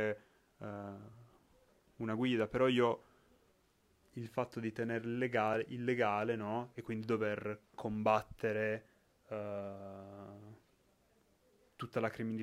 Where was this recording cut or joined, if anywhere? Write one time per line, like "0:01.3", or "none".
none

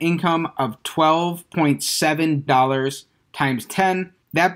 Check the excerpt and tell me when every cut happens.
0:02.5

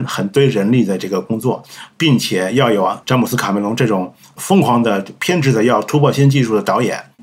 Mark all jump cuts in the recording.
0:03.0

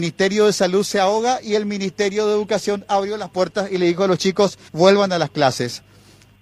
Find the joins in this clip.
0:04.7

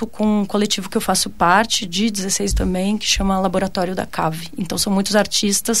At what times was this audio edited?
0:02.5

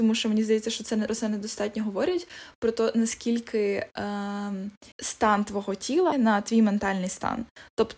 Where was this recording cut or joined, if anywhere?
0:01.1
0:04.9
0:06.1

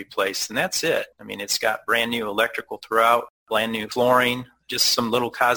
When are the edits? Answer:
0:01.1
0:03.4

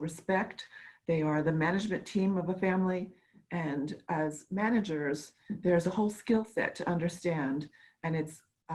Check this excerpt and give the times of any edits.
none

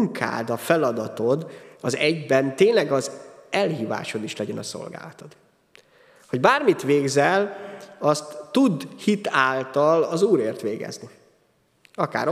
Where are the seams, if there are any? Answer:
none

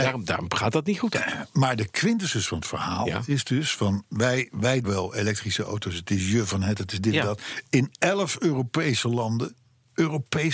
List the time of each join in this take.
0:04.8

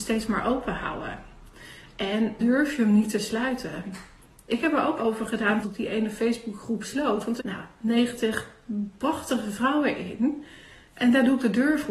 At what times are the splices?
0:02.4
0:05.0
0:05.6
0:07.4

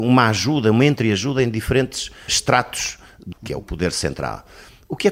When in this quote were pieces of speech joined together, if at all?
0:02.3
0:03.3
0:03.6

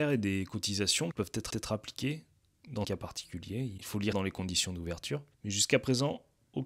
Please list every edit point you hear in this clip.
0:01.1
0:01.5
0:02.8
0:04.1
0:05.3

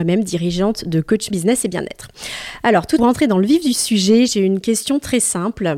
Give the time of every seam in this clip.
0:01.3
0:03.0

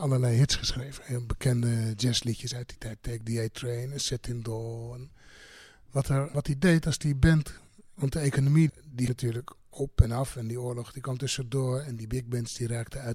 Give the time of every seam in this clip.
0:06.3
0:08.7
0:09.1

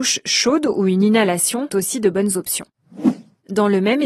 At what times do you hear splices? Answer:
0:01.7

